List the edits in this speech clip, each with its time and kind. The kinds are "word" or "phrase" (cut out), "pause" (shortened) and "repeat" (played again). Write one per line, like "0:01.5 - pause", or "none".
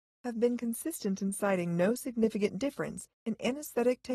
0:03.1 - pause